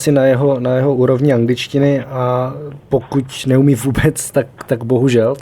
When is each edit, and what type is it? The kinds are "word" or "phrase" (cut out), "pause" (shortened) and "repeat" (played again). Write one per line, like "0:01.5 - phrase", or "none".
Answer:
0:02.8 - pause